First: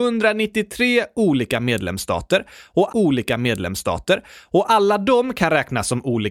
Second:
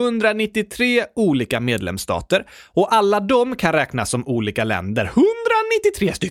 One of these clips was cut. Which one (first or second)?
first